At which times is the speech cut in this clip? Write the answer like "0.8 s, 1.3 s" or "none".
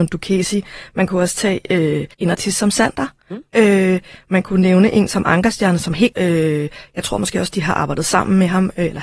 2.1 s, 6.1 s